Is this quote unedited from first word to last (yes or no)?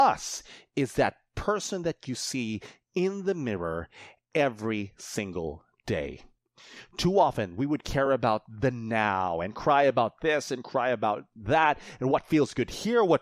yes